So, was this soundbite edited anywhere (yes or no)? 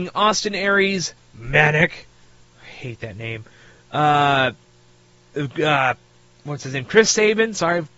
no